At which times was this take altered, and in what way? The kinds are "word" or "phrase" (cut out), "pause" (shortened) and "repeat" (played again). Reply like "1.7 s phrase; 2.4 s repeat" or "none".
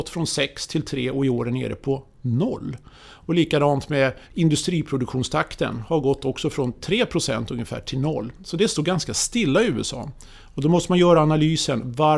4.2 s pause